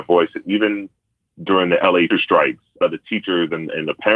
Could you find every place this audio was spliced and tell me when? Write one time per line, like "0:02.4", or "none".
0:02.1
0:02.8